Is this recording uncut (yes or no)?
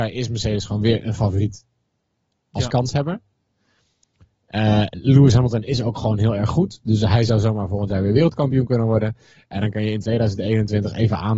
yes